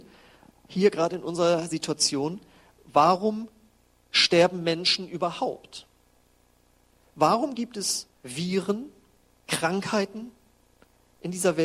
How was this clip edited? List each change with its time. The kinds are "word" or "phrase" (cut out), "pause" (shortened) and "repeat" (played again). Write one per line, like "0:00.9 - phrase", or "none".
none

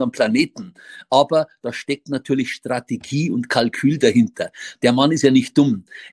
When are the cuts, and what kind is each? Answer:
none

